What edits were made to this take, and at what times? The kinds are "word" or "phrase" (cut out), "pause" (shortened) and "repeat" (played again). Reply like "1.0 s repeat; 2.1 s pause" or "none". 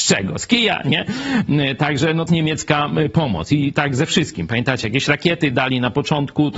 2.3 s phrase

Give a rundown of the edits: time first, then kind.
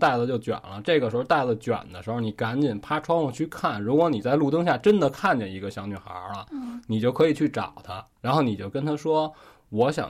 8.1 s pause

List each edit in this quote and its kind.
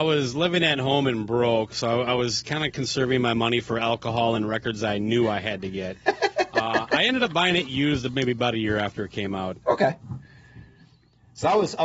none

